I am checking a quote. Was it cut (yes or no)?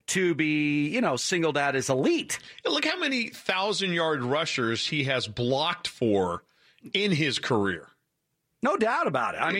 no